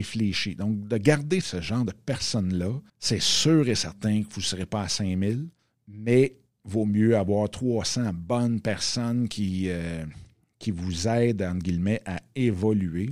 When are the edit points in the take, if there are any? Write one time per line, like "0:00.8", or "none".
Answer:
0:01.4
0:02.9
0:05.6